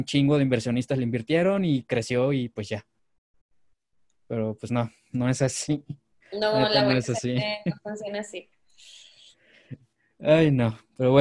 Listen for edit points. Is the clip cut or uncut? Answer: uncut